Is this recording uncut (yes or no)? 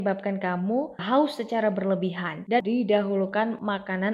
no